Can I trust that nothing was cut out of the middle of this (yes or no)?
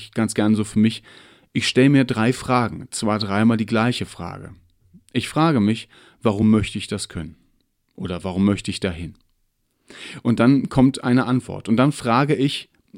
yes